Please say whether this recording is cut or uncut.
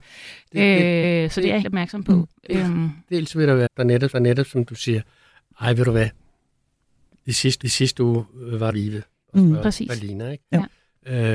cut